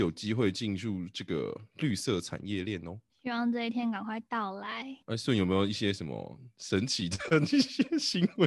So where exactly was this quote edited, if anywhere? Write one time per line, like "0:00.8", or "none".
0:03.1
0:05.0